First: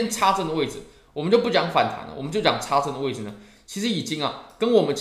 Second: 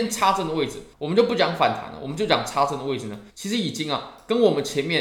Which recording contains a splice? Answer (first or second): second